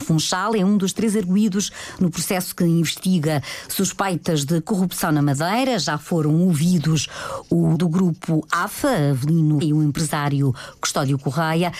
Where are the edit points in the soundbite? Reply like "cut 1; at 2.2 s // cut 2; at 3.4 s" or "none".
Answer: cut 1; at 7.7 s // cut 2; at 9.6 s